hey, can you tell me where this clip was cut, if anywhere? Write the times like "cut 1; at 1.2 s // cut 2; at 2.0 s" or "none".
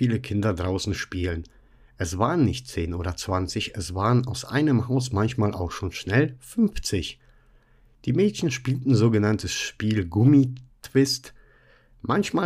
none